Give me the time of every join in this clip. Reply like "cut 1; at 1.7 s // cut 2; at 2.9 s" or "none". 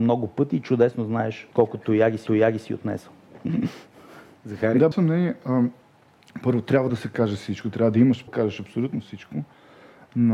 cut 1; at 1.5 s // cut 2; at 2.3 s // cut 3; at 4.9 s // cut 4; at 6.9 s // cut 5; at 8.3 s